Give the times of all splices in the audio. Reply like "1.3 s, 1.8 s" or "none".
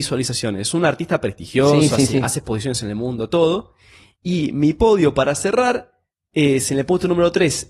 none